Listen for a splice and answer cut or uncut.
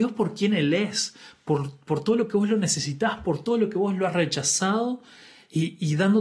uncut